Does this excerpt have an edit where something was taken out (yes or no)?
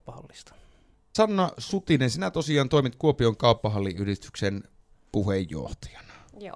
no